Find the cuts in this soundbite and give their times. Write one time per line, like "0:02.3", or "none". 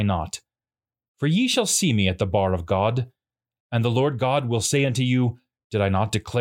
none